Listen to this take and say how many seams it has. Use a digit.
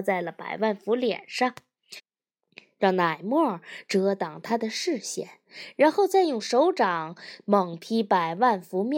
0